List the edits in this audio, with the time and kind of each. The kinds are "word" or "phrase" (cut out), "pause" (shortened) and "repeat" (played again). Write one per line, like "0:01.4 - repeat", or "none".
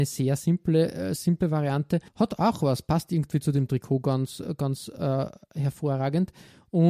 0:02.1 - pause